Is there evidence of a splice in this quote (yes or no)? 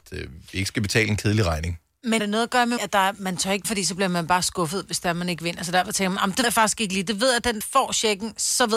yes